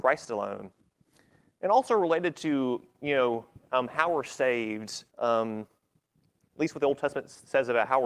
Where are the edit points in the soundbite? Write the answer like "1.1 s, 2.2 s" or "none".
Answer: 1.0 s, 5.1 s

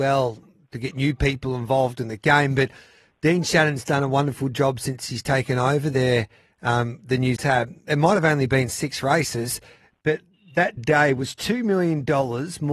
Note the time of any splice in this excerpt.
7.4 s, 10.8 s

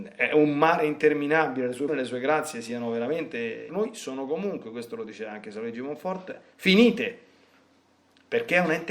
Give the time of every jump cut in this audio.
1.9 s, 3.7 s

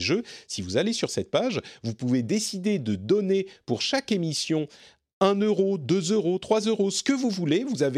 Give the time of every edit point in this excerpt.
none

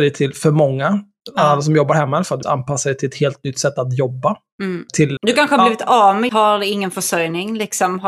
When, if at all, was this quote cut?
2.4 s, 5.2 s, 6.3 s

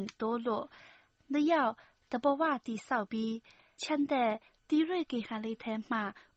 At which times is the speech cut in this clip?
3.8 s

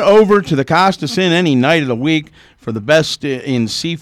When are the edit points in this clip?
none

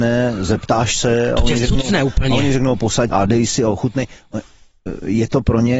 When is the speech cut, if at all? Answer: 3.1 s

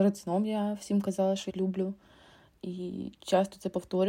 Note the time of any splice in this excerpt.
1.5 s

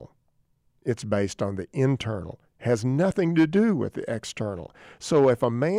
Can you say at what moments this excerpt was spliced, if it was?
none

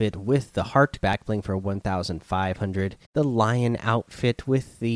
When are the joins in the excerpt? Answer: 1.0 s, 3.0 s

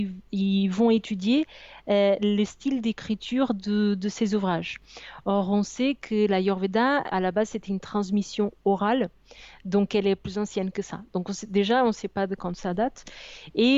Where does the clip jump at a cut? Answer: 7.1 s

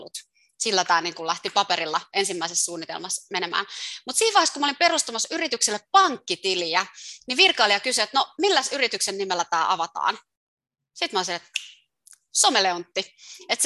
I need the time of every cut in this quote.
none

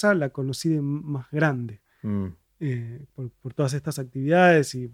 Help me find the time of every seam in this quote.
3.1 s

